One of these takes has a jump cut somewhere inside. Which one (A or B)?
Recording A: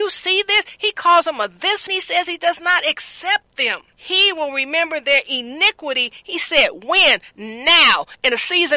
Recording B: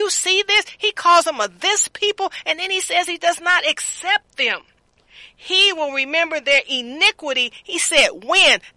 A